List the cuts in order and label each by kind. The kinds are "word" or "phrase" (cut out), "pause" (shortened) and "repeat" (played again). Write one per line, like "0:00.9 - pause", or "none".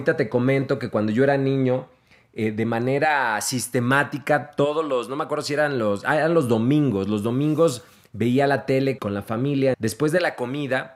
0:09.0 - word
0:09.7 - word